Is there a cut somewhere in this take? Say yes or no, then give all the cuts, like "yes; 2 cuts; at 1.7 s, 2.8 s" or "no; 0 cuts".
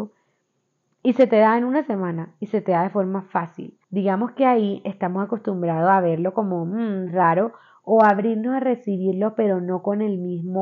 yes; 1 cut; at 3.8 s